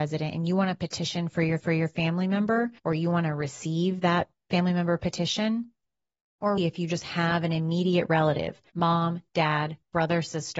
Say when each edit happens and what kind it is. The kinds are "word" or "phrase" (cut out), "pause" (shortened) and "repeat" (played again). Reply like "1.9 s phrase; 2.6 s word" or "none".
1.6 s repeat; 2.8 s pause; 6.6 s word; 8.7 s pause